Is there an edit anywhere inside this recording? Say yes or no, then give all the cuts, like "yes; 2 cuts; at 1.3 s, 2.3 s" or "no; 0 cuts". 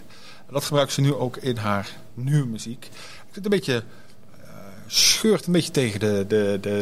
no; 0 cuts